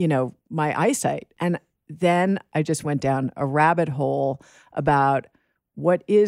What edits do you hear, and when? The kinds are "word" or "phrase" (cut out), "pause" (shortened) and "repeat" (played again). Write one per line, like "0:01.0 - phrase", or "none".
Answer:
none